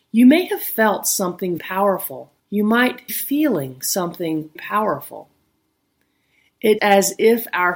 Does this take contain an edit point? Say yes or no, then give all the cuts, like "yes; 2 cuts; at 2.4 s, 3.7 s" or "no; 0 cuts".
yes; 5 cuts; at 1.6 s, 2.4 s, 3.1 s, 4.6 s, 6.8 s